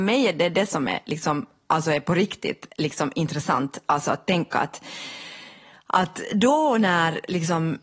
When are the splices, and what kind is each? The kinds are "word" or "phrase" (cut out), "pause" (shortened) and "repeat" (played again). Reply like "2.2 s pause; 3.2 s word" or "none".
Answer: none